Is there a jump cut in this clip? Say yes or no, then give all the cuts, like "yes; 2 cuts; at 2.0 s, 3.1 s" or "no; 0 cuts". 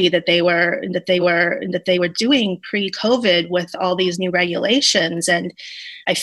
yes; 1 cut; at 1.2 s